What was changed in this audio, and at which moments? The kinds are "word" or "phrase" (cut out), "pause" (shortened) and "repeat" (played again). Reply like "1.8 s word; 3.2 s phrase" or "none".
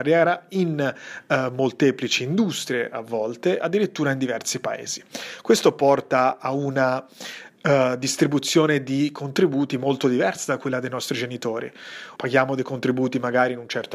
12.2 s pause

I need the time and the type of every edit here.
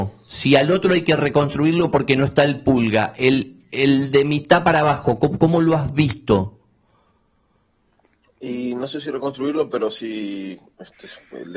none

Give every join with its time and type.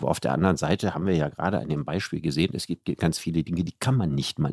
none

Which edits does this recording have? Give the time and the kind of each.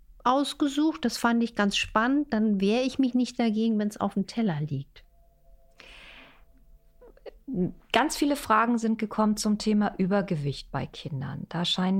none

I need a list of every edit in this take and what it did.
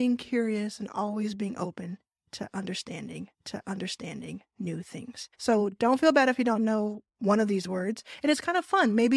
3.3 s repeat; 5.3 s pause

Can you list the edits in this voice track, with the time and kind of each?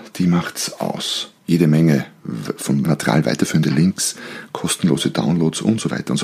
1.4 s pause; 2.8 s word

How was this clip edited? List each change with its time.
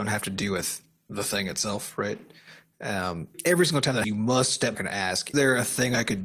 3.3 s word; 4.0 s word; 4.7 s word; 5.3 s word

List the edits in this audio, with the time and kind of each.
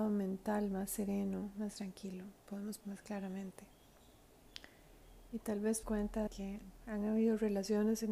1.7 s phrase; 2.8 s word; 5.8 s phrase; 6.3 s word

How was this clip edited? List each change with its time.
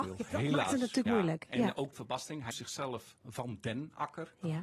1.1 s word; 1.9 s word; 2.5 s word; 3.2 s word

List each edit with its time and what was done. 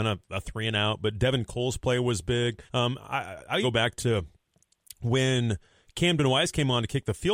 2.7 s pause; 3.6 s word

